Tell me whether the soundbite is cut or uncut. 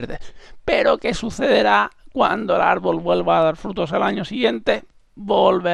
uncut